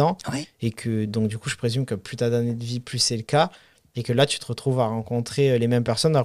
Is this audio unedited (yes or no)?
yes